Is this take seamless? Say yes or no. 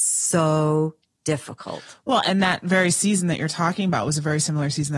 yes